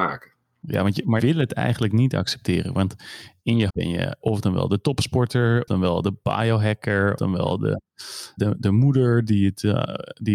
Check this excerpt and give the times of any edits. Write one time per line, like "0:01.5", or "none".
0:01.2
0:03.7
0:04.2
0:05.7
0:07.2
0:08.4